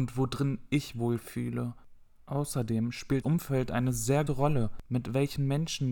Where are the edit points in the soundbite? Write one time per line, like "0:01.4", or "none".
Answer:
0:00.9
0:03.2
0:04.3